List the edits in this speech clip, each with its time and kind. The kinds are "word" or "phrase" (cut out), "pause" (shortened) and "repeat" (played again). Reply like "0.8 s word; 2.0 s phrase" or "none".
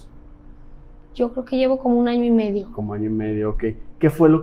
none